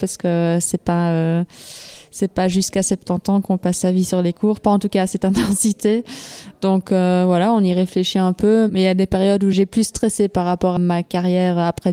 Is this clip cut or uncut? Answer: cut